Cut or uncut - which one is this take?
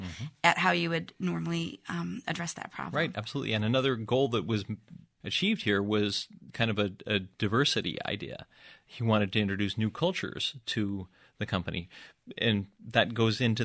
uncut